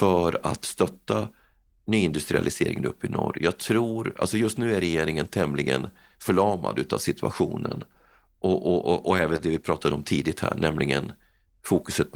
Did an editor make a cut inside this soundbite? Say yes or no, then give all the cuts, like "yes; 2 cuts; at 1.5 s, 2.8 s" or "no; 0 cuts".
no; 0 cuts